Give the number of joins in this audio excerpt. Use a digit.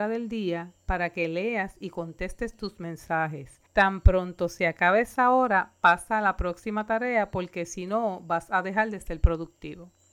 1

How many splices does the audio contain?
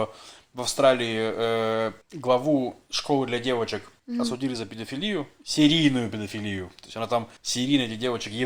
3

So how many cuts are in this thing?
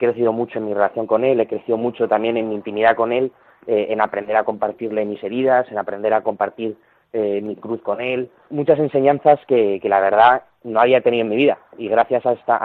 1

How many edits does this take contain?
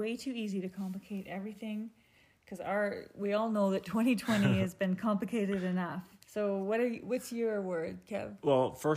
1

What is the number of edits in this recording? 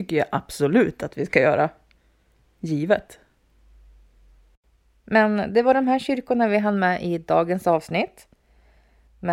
0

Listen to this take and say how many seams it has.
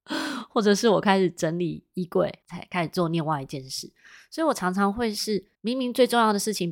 2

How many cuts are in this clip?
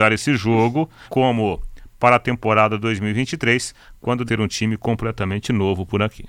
3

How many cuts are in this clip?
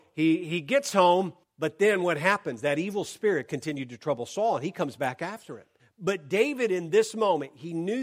2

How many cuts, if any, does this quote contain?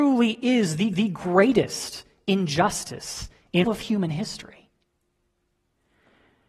2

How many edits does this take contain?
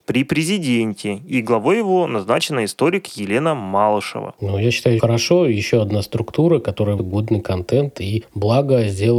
2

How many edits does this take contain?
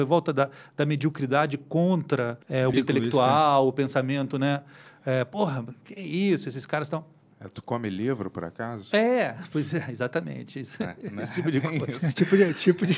2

